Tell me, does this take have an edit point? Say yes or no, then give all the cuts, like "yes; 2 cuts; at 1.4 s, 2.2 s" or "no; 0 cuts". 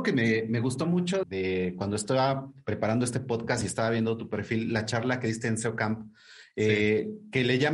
yes; 1 cut; at 1.2 s